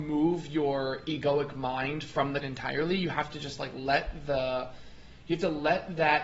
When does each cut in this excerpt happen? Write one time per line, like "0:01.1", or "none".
0:02.4

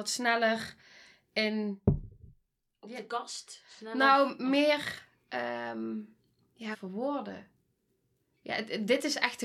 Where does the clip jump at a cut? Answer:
0:06.7

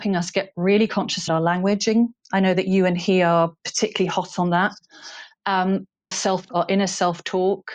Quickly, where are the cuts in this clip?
0:01.3
0:06.1
0:06.5

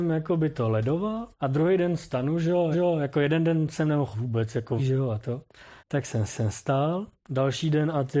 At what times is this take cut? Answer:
0:01.3
0:02.7
0:04.1
0:04.8
0:05.8
0:06.3

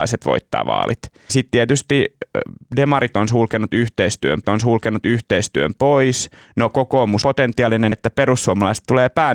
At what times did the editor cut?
0:01.3
0:04.4
0:07.2
0:07.9

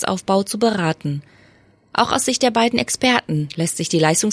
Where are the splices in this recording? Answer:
none

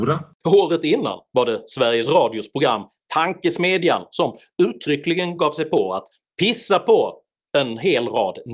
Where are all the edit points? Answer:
none

